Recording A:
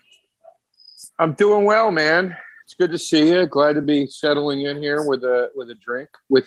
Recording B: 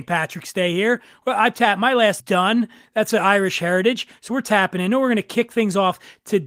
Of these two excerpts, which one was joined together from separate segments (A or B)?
B